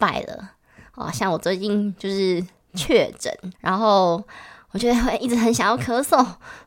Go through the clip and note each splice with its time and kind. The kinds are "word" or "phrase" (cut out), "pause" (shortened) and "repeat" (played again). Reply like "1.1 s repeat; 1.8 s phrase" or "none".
3.6 s pause